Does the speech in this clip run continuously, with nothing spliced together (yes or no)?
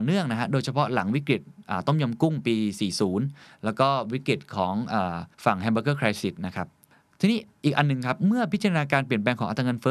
no